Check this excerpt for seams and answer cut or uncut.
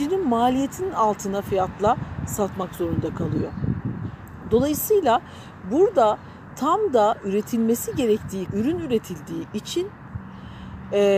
cut